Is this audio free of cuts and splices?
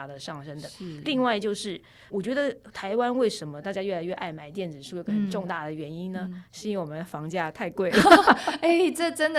no; 1 cut; at 2.1 s

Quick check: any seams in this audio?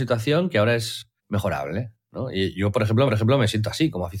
yes; 2 cuts; at 1.2 s, 3.1 s

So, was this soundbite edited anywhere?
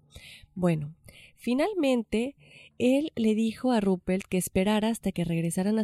no; 0 cuts

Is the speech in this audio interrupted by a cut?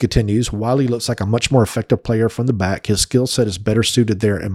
no; 0 cuts

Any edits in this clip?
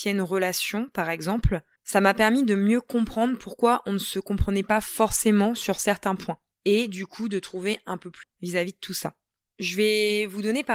yes; 1 cut; at 8.2 s

